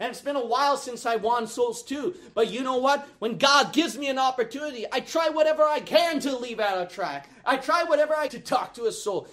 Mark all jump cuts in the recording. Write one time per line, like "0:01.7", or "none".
0:08.3